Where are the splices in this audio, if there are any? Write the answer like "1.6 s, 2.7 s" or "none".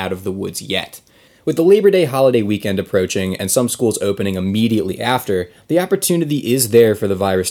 none